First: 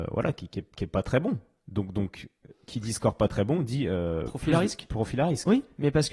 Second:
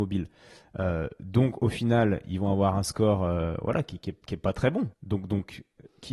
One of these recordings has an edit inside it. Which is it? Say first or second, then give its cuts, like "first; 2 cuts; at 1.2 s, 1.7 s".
second; 1 cut; at 4.9 s